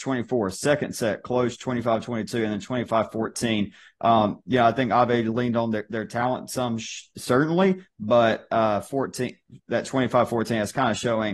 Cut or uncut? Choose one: uncut